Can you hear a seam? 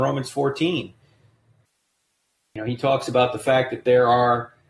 no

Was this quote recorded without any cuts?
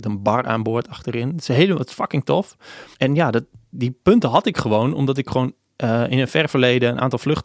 no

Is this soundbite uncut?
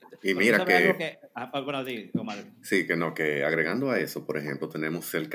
yes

